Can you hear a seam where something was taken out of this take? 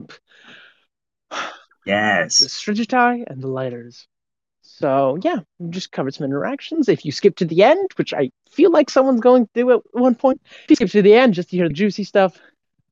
no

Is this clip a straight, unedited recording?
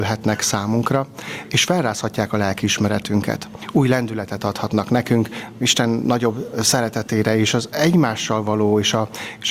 yes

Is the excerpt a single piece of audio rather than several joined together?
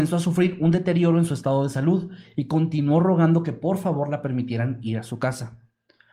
yes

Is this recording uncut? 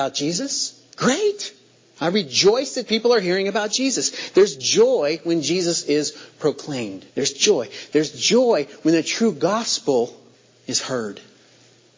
no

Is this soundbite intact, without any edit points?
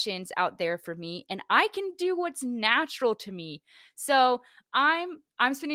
yes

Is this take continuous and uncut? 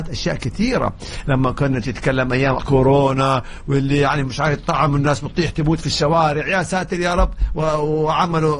no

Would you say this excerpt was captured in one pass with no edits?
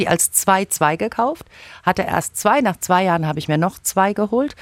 yes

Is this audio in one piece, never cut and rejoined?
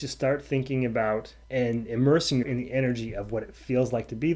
no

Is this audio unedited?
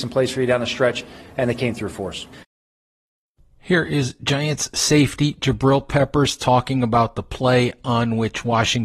yes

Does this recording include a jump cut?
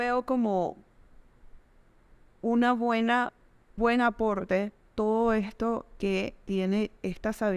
yes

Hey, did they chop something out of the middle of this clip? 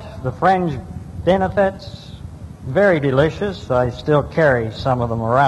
no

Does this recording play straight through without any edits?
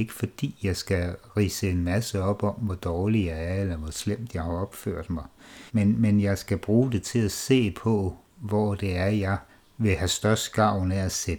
no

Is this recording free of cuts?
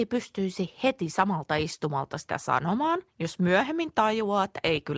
yes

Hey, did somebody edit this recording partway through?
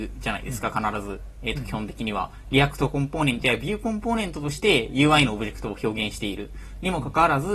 no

